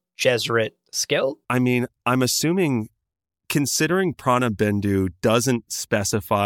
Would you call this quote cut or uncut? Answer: cut